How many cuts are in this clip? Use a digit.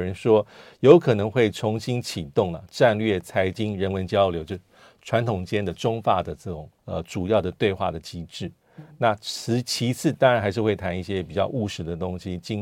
1